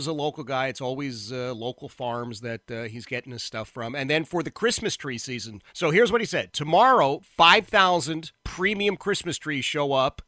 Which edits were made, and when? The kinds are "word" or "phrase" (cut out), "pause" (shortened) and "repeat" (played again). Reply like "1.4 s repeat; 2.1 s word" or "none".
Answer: 5.7 s pause; 8.4 s pause